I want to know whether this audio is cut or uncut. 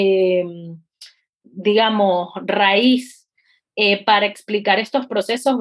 uncut